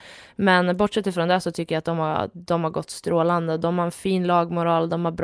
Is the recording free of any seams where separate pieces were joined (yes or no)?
yes